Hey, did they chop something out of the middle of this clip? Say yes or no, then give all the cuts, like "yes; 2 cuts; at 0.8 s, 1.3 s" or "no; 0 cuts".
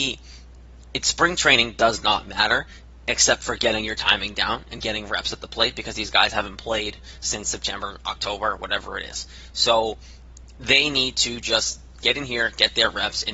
no; 0 cuts